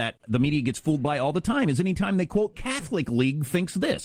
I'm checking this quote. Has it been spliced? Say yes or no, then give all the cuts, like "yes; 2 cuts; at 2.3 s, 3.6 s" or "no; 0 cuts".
yes; 1 cut; at 2.5 s